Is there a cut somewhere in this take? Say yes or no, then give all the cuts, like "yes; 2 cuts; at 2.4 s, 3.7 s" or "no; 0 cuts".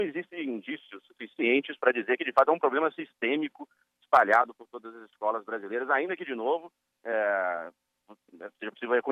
no; 0 cuts